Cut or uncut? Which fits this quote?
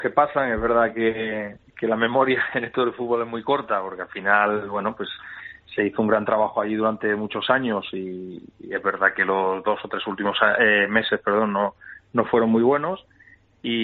cut